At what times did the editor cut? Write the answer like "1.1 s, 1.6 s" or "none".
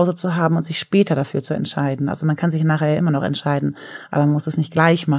none